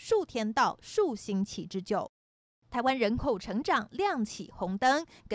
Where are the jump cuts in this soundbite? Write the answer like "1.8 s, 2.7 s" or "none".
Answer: none